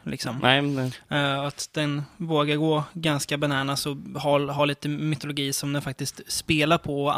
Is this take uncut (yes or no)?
yes